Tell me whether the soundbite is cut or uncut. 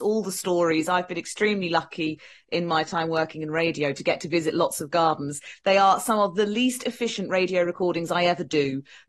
uncut